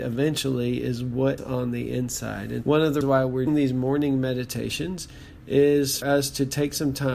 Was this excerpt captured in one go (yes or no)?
no